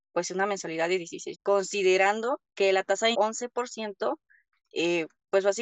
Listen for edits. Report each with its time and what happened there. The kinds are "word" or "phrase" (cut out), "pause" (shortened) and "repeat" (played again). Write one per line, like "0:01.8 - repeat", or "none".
0:01.3 - word
0:02.4 - pause
0:03.1 - phrase